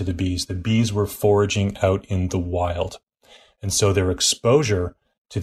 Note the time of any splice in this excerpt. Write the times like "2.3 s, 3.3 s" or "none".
none